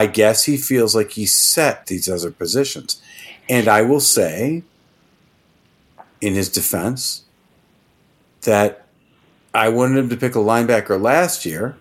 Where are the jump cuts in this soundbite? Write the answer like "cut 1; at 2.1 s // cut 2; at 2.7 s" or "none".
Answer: cut 1; at 1.8 s